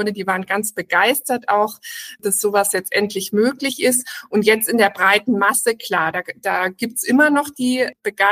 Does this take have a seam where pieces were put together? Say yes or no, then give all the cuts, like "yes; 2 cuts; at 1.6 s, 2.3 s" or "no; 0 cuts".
no; 0 cuts